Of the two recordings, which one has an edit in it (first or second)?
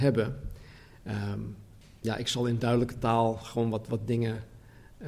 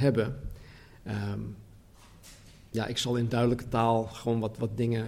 first